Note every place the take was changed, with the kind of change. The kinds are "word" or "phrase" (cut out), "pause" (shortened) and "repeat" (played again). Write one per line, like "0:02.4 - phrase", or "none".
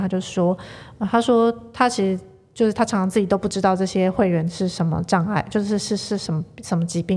none